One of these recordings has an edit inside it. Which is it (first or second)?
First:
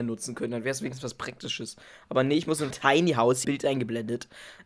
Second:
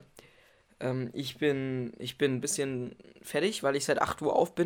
first